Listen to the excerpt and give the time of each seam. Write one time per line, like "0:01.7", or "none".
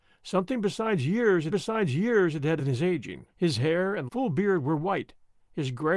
0:01.5
0:02.6
0:03.3
0:04.1

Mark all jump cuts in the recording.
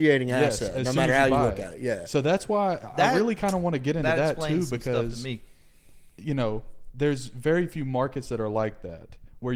none

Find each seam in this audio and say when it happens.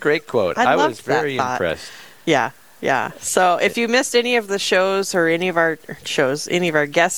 none

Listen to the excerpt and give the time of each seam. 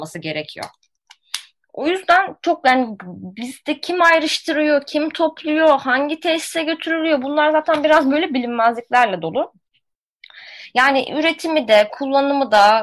none

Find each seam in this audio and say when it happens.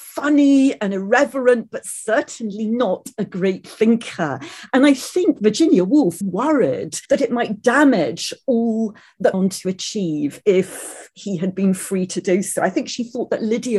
0:06.2
0:07.0
0:09.3

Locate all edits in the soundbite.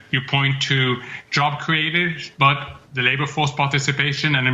0:02.3

